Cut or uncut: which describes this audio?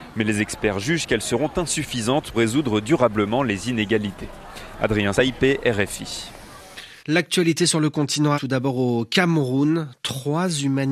cut